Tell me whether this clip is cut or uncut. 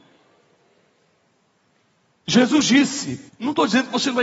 cut